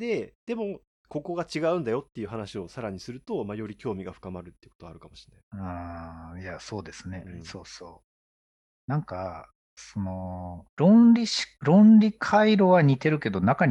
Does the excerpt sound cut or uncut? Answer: cut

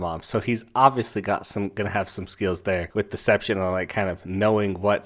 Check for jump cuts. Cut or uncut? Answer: uncut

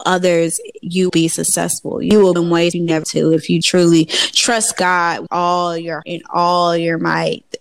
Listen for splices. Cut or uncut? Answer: cut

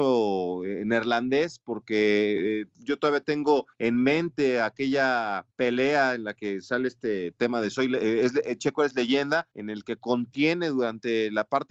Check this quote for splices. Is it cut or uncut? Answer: cut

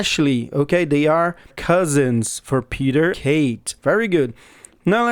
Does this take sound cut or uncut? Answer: cut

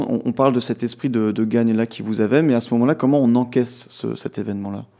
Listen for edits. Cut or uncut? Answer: cut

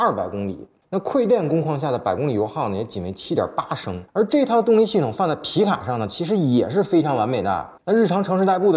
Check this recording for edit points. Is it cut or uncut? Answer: cut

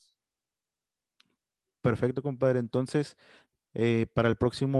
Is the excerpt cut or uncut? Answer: uncut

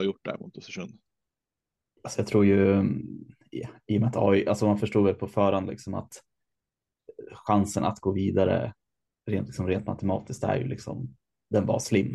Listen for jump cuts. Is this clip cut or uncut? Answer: uncut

